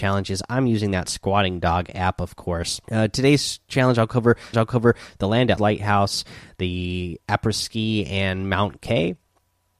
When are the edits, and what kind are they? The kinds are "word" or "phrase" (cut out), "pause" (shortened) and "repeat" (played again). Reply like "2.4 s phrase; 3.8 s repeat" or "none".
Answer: 2.8 s pause; 4.5 s repeat; 5.6 s word; 7.2 s pause